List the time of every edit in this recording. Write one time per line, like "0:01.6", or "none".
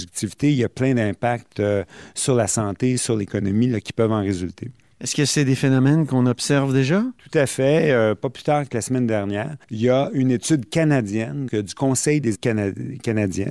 0:09.6
0:11.5
0:12.3